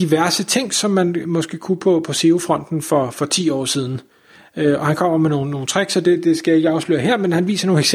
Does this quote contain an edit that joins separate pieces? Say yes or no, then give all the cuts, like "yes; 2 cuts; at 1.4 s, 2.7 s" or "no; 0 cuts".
no; 0 cuts